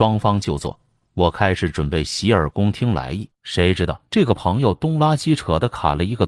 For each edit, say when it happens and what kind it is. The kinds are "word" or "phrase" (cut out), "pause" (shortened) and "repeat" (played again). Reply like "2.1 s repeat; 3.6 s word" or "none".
3.3 s pause; 4.1 s pause